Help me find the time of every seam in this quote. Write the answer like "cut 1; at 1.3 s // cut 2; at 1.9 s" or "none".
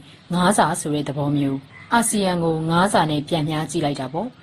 cut 1; at 1.7 s